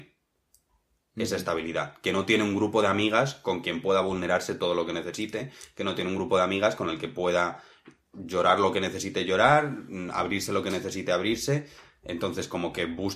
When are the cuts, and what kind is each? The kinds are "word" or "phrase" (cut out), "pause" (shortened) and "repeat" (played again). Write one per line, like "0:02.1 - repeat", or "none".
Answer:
none